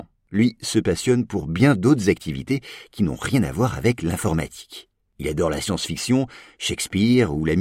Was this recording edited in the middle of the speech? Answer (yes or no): no